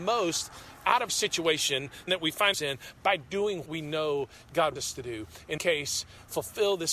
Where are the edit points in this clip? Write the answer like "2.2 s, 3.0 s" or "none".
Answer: 1.1 s, 2.1 s, 2.5 s, 3.7 s, 4.8 s, 5.6 s